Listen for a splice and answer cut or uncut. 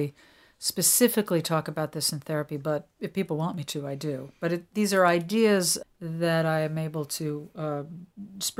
cut